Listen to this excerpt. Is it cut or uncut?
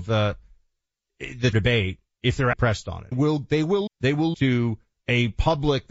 cut